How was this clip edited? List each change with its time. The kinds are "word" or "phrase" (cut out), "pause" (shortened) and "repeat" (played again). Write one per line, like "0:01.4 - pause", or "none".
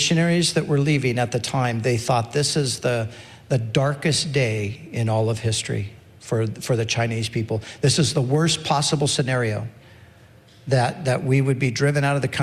none